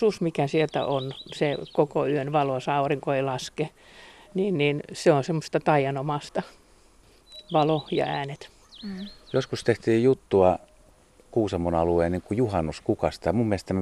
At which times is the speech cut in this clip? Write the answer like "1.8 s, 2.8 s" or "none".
none